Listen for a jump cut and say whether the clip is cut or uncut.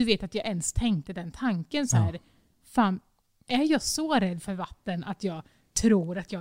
uncut